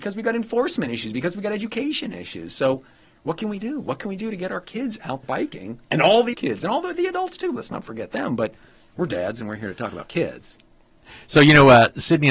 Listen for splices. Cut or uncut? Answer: cut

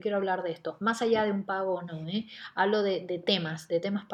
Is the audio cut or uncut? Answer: uncut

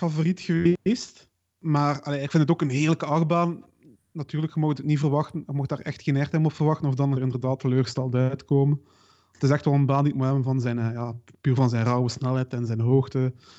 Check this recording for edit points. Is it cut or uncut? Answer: cut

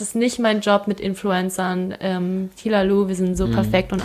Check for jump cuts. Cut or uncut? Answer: uncut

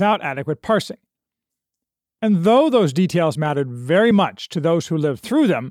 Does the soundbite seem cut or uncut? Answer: uncut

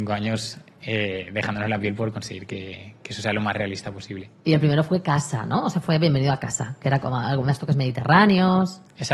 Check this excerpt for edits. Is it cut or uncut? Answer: uncut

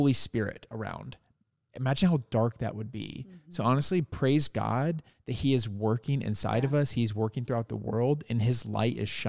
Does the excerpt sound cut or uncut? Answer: uncut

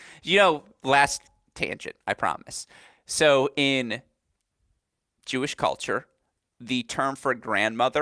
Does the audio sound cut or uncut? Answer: uncut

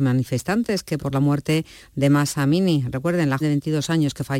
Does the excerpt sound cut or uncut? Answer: cut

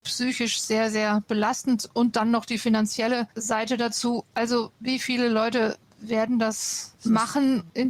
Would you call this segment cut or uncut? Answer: uncut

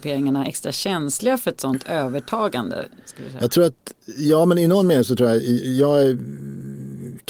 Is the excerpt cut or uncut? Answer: uncut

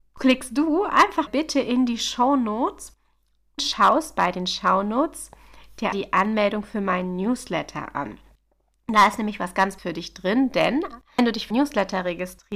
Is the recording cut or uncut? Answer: cut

